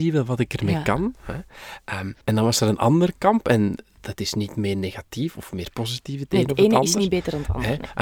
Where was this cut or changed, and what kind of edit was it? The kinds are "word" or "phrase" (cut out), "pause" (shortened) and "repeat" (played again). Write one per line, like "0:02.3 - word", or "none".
0:02.2 - pause
0:05.3 - word